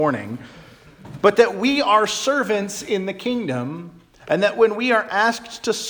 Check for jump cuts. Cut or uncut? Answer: uncut